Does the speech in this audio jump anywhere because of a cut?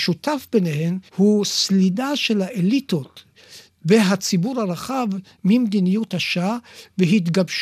yes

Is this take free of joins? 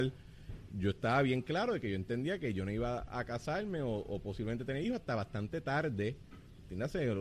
yes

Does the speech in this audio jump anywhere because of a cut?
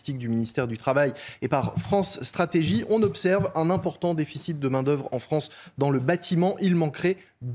no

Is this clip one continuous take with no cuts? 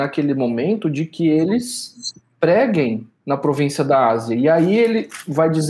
yes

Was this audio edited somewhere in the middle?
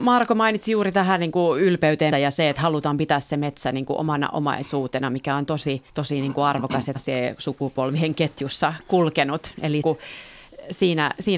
yes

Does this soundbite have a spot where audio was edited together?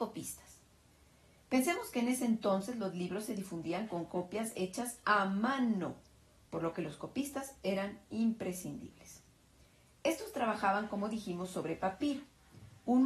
no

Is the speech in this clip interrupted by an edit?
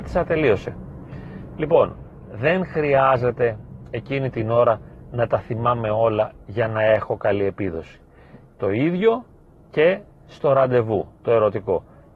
no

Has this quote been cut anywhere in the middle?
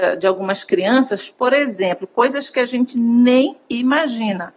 no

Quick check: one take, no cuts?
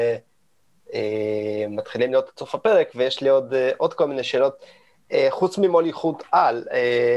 yes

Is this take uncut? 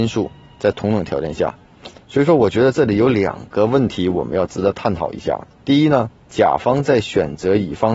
no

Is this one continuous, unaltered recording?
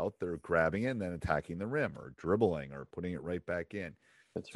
yes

